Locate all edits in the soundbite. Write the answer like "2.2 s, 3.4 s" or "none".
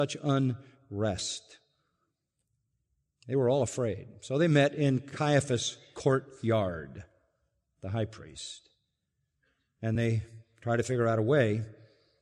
none